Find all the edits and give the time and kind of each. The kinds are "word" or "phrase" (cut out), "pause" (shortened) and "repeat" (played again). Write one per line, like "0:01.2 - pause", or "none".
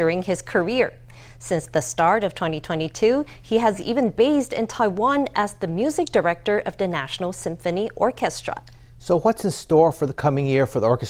none